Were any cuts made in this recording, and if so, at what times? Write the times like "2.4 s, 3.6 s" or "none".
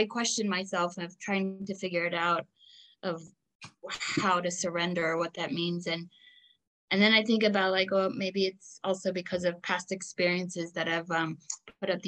none